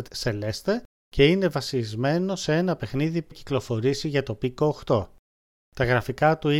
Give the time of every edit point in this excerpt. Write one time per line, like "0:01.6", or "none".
0:03.3